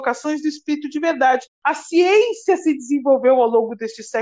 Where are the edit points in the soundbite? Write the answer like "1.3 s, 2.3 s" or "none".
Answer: 1.5 s

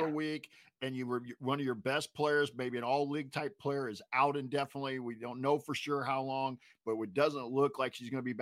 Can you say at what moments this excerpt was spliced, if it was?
none

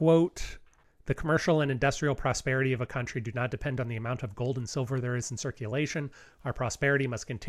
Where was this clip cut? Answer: none

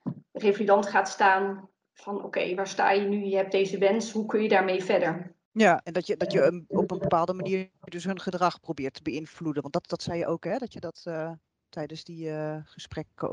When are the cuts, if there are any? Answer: none

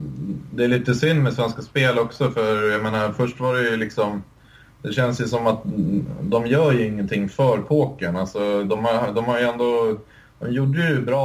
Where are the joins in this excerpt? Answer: none

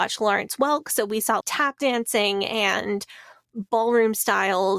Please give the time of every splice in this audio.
1.4 s

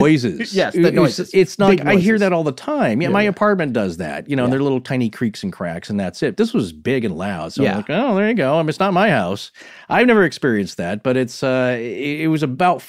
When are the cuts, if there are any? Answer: none

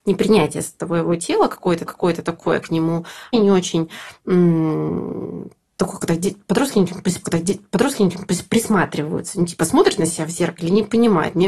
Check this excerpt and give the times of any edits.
1.9 s, 3.3 s, 7.2 s

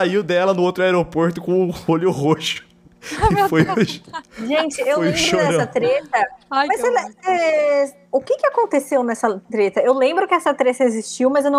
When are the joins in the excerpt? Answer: none

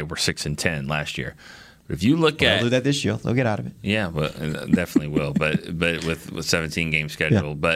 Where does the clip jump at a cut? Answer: none

